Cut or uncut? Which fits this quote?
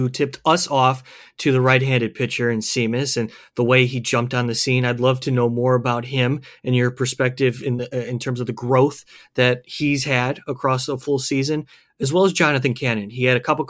uncut